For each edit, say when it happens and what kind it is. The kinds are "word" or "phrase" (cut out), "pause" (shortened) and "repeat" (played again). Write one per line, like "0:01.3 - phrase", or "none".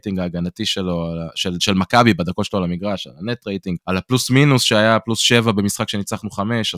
0:03.8 - pause